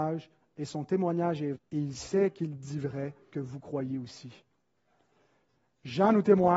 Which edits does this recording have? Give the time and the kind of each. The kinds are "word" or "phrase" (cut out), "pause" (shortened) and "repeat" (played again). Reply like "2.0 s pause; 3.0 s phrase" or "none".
1.5 s word; 3.3 s word